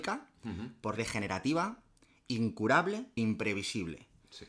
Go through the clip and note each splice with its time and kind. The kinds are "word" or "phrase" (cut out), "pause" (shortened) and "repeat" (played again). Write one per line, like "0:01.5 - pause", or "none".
0:01.0 - word
0:03.2 - word